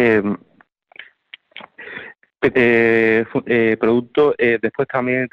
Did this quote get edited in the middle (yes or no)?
yes